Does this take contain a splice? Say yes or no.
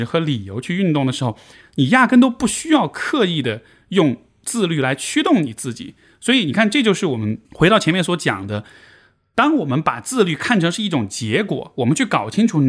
yes